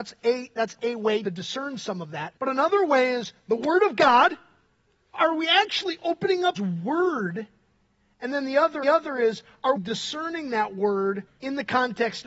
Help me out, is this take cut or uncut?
cut